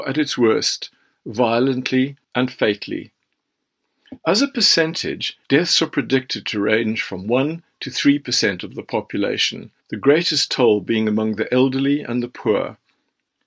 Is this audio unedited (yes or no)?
no